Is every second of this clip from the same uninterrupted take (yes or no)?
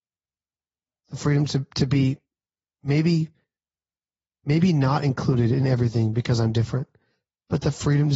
yes